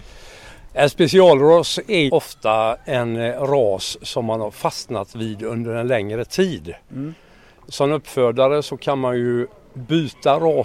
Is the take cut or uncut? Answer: cut